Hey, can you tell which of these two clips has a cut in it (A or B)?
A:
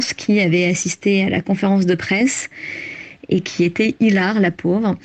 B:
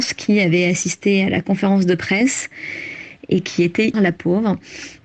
B